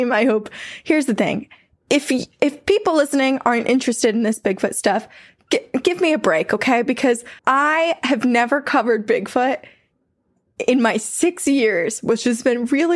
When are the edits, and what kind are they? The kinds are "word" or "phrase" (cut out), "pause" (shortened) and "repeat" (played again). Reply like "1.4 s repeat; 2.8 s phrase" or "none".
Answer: 7.4 s pause